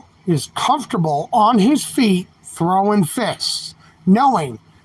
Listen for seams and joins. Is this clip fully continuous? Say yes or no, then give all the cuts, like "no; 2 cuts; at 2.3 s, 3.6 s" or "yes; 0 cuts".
yes; 0 cuts